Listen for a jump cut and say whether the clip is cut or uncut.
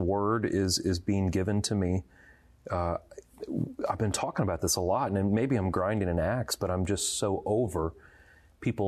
uncut